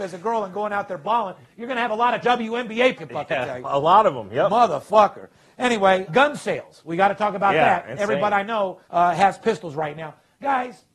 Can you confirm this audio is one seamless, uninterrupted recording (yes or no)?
no